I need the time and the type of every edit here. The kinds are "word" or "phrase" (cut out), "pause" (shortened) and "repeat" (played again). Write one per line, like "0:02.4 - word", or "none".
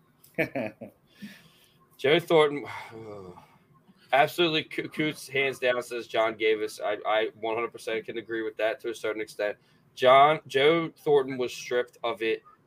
none